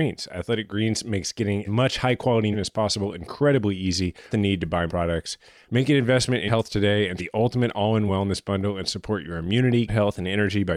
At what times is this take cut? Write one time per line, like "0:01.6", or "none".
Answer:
0:01.6
0:02.5
0:04.3
0:04.9
0:06.5
0:07.2
0:08.1
0:09.9